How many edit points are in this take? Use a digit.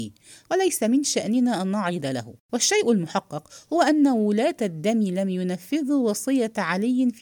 1